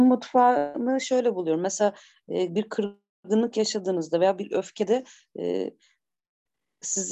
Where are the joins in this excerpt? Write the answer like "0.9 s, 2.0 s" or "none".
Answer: none

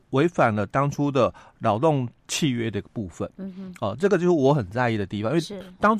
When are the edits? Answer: 2.2 s

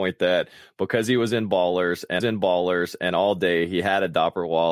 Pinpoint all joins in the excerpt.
2.2 s

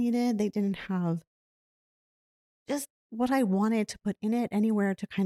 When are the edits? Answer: none

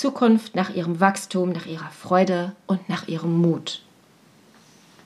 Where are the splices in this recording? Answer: none

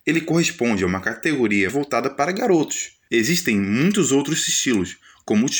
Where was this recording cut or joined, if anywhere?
1.7 s

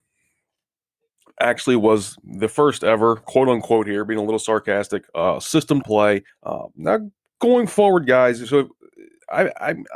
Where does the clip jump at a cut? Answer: 3.2 s, 5.8 s, 6.3 s

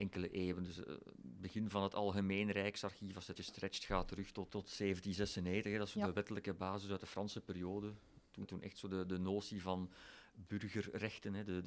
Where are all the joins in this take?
3.4 s, 4.5 s, 5.9 s, 8.4 s

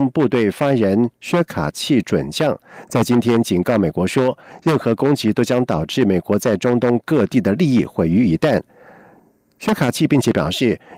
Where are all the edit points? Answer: none

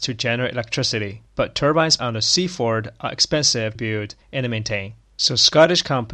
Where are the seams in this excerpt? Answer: 1.3 s, 2.0 s, 3.8 s, 4.2 s, 5.0 s

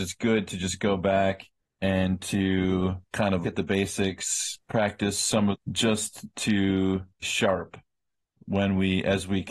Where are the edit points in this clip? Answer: 1.6 s, 3.1 s, 3.4 s, 4.6 s, 5.5 s, 7.2 s

